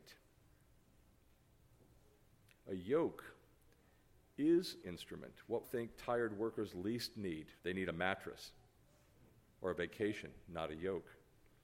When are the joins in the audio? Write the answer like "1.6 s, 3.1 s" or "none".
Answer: 4.8 s, 5.6 s, 7.6 s